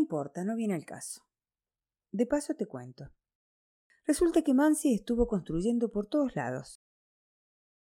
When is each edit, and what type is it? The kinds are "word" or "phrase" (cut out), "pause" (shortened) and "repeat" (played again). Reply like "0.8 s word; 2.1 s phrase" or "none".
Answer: none